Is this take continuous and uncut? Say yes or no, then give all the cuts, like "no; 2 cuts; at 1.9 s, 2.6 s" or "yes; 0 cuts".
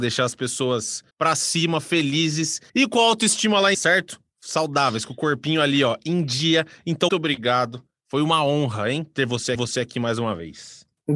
no; 5 cuts; at 1.1 s, 2.7 s, 3.7 s, 7.1 s, 9.5 s